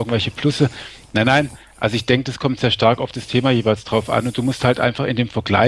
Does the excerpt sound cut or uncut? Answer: uncut